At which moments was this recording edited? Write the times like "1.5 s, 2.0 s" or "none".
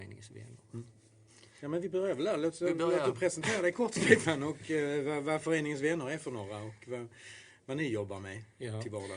none